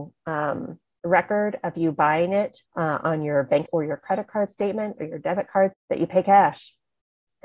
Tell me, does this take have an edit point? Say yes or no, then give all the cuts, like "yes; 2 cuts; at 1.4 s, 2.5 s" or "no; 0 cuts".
yes; 3 cuts; at 2.7 s, 3.7 s, 5.7 s